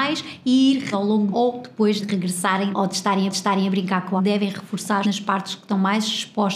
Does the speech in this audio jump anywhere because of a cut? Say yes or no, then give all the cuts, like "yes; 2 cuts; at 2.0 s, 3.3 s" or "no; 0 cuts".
yes; 7 cuts; at 0.9 s, 1.3 s, 2.0 s, 2.7 s, 3.3 s, 4.2 s, 5.0 s